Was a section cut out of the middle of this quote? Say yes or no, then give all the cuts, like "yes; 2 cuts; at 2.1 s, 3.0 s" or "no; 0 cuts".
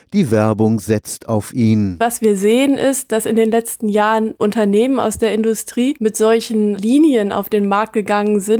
no; 0 cuts